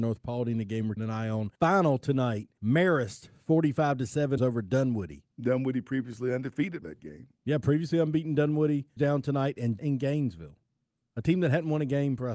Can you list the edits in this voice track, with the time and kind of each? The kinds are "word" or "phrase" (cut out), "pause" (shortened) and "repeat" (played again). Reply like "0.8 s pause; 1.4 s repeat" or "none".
1.0 s word; 1.6 s pause; 2.6 s pause; 4.4 s word; 5.3 s pause; 6.8 s word; 9.0 s word; 9.8 s word